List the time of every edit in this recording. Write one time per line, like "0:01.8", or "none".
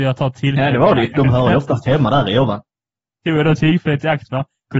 0:01.1